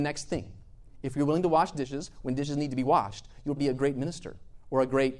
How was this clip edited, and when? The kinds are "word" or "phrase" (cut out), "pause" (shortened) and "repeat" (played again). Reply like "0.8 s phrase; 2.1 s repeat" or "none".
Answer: 3.6 s word